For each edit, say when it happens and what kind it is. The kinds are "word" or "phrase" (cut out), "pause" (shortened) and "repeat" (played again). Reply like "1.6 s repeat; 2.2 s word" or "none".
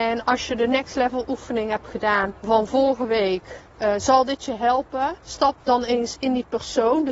2.4 s pause; 3.7 s pause; 5.2 s pause